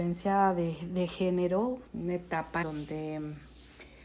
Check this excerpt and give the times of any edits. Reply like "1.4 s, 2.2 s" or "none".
1.9 s, 2.6 s